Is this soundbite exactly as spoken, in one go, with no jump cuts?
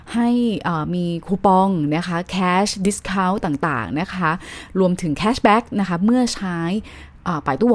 yes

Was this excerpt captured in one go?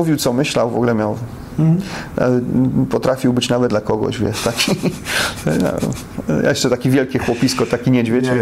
no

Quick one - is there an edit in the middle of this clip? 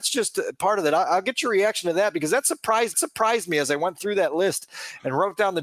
yes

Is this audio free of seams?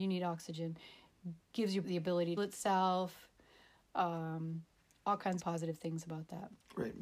no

